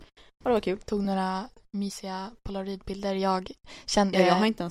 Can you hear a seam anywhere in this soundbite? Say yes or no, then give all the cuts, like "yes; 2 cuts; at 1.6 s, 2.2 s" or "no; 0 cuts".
no; 0 cuts